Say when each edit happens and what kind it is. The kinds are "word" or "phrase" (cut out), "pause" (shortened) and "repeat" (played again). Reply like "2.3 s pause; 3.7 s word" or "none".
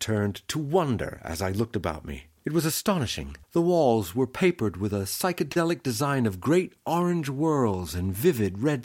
2.4 s pause; 3.4 s pause